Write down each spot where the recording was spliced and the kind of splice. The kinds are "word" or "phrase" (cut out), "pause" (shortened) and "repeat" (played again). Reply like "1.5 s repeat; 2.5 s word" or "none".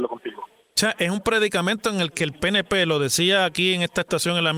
none